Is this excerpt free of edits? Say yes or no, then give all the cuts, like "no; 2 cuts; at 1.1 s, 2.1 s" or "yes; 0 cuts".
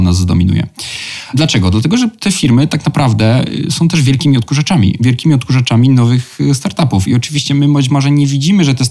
yes; 0 cuts